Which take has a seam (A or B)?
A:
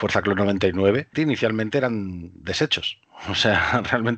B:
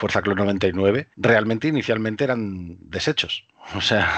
A